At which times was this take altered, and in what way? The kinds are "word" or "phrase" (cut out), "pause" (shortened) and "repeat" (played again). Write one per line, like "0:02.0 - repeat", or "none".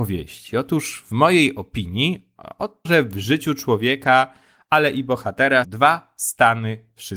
0:02.9 - word
0:05.6 - word